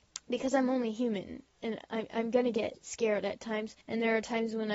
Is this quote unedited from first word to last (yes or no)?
no